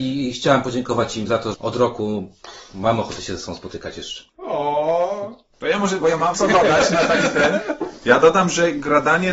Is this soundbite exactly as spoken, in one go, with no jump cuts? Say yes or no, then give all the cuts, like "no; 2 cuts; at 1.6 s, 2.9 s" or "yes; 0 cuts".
no; 3 cuts; at 1.5 s, 4.3 s, 6.3 s